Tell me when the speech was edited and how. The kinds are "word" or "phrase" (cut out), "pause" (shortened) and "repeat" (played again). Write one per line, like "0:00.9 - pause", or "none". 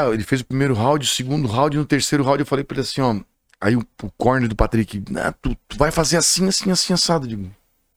0:03.3 - pause